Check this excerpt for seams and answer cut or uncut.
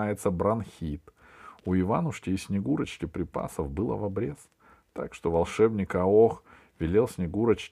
uncut